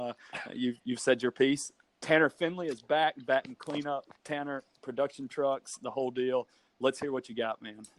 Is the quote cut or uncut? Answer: cut